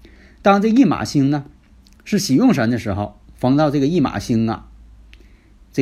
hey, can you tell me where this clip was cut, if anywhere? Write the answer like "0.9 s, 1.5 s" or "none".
none